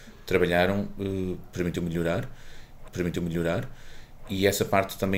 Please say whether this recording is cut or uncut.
cut